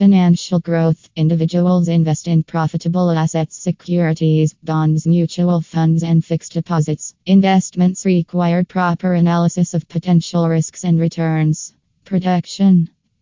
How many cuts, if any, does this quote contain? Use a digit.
1